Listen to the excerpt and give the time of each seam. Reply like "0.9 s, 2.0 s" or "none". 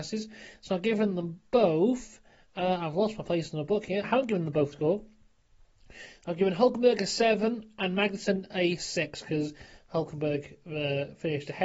4.0 s, 4.7 s